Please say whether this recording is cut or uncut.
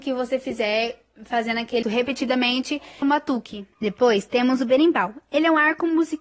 cut